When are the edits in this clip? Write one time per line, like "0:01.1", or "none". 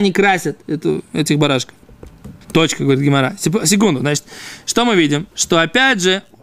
0:02.4
0:05.3